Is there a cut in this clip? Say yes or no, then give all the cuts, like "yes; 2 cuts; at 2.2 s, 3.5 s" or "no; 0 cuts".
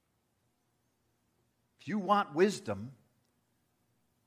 no; 0 cuts